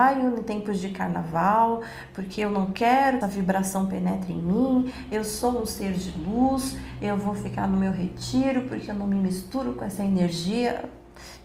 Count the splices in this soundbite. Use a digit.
1